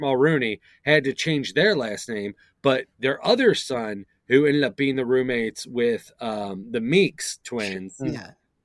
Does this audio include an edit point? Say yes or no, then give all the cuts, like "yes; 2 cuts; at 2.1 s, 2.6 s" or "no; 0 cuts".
no; 0 cuts